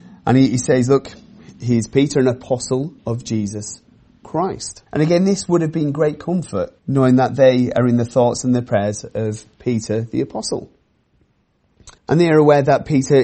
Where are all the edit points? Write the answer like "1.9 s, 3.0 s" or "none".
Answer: 3.0 s, 4.9 s, 6.8 s, 12.0 s